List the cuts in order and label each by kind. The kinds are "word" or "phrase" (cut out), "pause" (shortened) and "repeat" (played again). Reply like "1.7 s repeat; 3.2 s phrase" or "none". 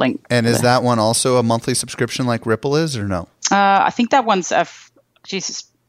3.4 s pause